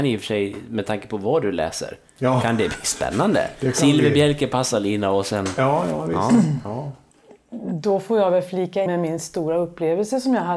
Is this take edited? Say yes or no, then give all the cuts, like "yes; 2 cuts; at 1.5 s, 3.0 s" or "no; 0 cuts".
yes; 1 cut; at 8.9 s